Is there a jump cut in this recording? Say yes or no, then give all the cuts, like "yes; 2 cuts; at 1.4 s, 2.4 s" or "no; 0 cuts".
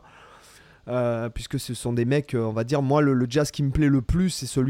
no; 0 cuts